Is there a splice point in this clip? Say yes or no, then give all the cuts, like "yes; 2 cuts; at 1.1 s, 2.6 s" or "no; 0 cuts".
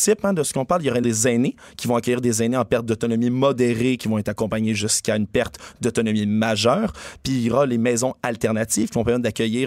yes; 1 cut; at 1.0 s